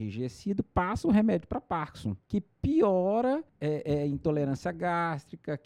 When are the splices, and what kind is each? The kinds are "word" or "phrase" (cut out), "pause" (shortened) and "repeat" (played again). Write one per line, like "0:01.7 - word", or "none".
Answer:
0:02.2 - pause
0:03.5 - pause